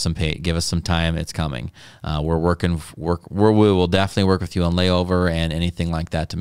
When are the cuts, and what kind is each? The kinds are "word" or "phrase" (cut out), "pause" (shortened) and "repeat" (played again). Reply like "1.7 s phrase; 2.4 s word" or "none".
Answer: none